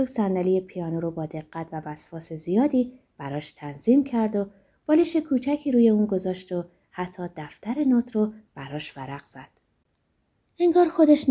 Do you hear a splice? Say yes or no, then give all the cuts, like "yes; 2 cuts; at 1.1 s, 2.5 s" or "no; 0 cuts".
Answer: no; 0 cuts